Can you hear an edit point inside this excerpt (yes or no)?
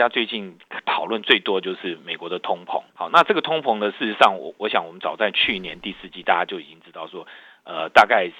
yes